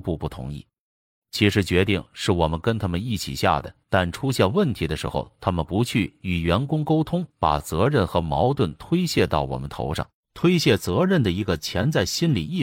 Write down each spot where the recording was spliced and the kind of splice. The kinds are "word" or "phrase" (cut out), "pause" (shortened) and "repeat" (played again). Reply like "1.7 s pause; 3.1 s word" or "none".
3.8 s pause; 7.3 s pause; 10.1 s pause

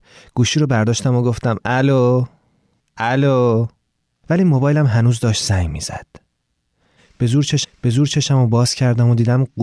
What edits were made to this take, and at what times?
7.6 s repeat

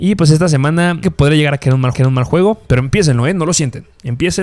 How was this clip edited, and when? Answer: 1.0 s phrase; 1.9 s repeat

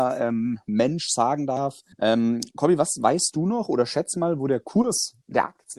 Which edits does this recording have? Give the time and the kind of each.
1.9 s pause

